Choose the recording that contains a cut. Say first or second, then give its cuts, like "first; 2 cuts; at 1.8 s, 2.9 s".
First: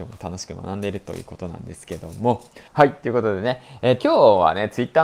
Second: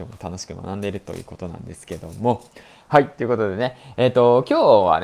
first; 2 cuts; at 2.7 s, 4.0 s